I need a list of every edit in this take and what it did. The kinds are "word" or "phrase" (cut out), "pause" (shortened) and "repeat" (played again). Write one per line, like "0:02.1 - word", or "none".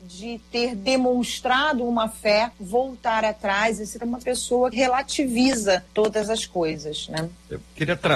0:02.5 - pause
0:04.0 - word
0:04.7 - word
0:05.9 - pause